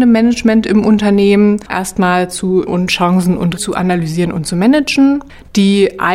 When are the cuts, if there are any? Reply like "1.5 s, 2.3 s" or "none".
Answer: 1.7 s, 2.7 s, 3.6 s